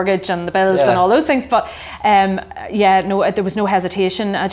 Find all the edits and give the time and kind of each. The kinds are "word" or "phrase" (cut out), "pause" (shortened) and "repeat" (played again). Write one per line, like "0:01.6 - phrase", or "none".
none